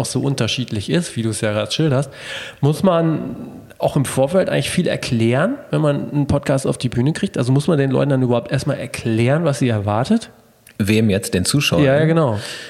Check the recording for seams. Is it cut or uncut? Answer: uncut